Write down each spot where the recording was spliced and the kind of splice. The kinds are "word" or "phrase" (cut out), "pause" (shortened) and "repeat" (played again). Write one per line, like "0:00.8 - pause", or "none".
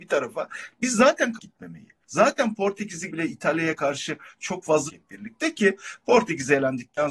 0:01.4 - word
0:02.0 - pause
0:03.1 - word
0:04.9 - phrase